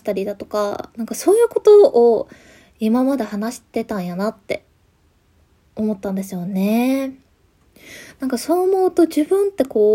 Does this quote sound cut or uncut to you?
uncut